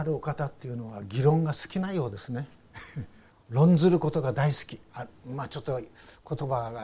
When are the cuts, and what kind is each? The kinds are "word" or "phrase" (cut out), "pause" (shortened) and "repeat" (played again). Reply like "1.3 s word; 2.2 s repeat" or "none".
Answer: 3.3 s pause